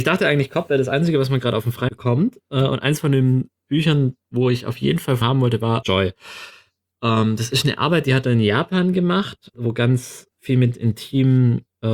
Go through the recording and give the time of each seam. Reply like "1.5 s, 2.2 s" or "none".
1.9 s, 5.2 s, 5.8 s, 9.5 s, 10.3 s